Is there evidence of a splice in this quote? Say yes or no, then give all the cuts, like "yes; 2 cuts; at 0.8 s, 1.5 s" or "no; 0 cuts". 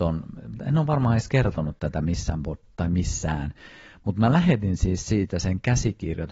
no; 0 cuts